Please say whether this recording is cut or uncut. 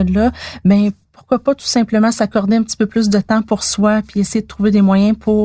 uncut